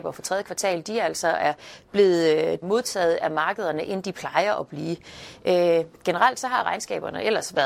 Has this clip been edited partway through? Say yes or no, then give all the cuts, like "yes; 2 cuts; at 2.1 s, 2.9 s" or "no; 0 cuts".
yes; 1 cut; at 2.6 s